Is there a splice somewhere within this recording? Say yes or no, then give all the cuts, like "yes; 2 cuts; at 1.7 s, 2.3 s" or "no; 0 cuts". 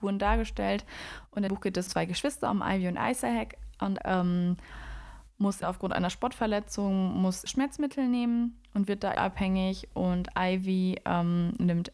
yes; 6 cuts; at 1.5 s, 1.9 s, 4.0 s, 5.6 s, 7.5 s, 9.1 s